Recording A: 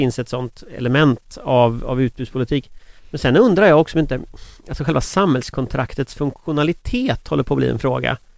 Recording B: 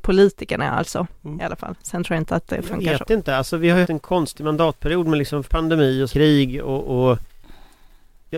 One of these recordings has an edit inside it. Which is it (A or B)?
B